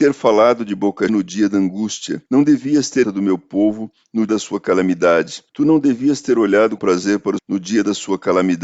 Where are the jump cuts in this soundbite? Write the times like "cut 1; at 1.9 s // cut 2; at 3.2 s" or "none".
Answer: cut 1; at 1.1 s // cut 2; at 2.3 s // cut 3; at 3.0 s // cut 4; at 4.3 s // cut 5; at 5.5 s // cut 6; at 6.8 s // cut 7; at 7.4 s